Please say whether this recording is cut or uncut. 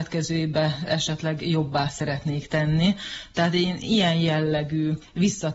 uncut